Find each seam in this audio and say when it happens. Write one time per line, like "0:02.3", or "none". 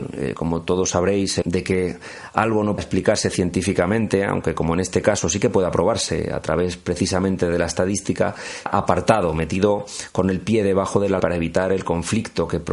0:01.4
0:02.8
0:08.7
0:11.2